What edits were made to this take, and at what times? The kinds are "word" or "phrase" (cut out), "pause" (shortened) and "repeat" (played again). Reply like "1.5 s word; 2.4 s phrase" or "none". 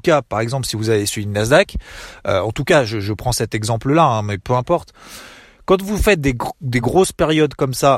none